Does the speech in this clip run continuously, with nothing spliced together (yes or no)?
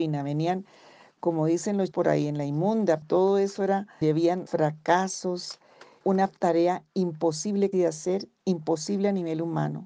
no